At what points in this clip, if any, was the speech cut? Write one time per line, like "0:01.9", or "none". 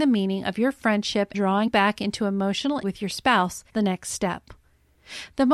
0:01.3
0:01.7
0:02.8
0:03.7